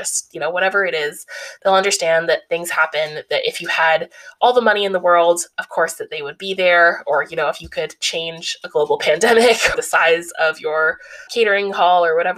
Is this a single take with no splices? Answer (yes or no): no